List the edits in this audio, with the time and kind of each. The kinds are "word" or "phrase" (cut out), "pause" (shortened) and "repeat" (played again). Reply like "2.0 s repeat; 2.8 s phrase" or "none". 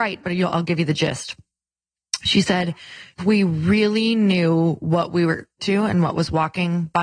3.2 s word; 5.6 s word